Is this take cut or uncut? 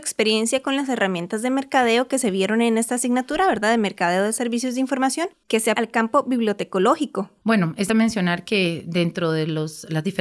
cut